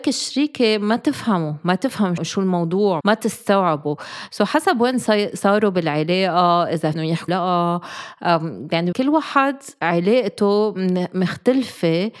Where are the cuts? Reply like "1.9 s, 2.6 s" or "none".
2.2 s, 3.0 s, 6.9 s, 7.3 s, 8.9 s